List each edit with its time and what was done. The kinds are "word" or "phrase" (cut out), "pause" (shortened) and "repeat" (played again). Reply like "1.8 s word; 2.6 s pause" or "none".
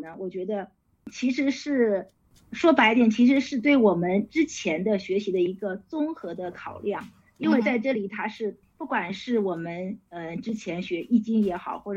none